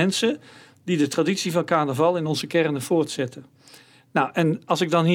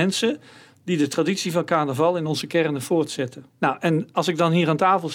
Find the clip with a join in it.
second; 1 cut; at 3.5 s

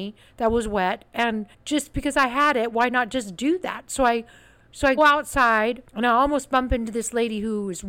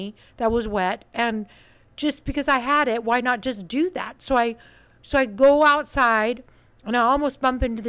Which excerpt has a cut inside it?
first; 3 cuts; at 1.5 s, 5.0 s, 5.9 s

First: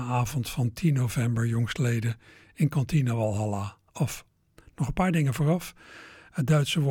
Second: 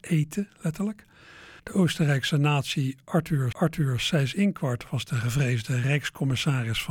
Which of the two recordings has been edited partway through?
second; 2 cuts; at 1.6 s, 3.5 s

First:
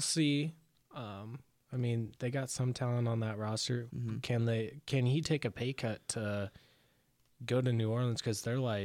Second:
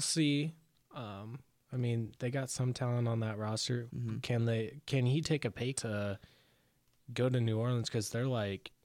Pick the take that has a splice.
second; 1 cut; at 5.7 s

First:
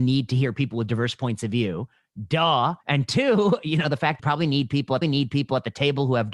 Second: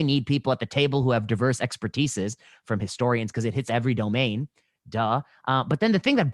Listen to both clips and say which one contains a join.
first; 3 cuts; at 2.8 s, 4.2 s, 5.0 s

